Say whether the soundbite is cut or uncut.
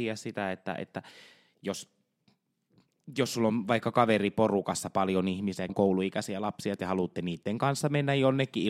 cut